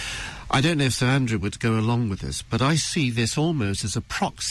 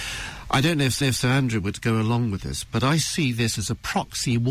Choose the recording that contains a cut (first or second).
second